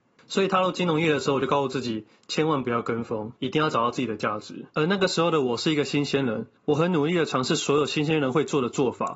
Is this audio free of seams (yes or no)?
no